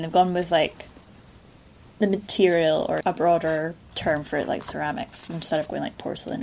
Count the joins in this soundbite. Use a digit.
1